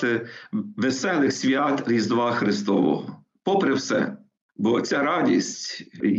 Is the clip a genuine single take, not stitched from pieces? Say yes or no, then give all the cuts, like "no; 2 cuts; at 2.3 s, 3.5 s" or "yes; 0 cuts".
yes; 0 cuts